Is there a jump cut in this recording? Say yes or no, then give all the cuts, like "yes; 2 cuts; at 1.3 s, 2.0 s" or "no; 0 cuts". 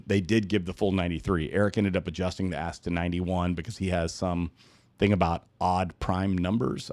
no; 0 cuts